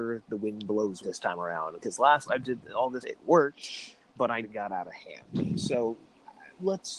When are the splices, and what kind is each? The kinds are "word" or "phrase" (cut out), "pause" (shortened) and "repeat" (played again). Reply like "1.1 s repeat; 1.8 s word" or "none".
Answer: 1.0 s word; 2.3 s word; 3.0 s word; 4.4 s word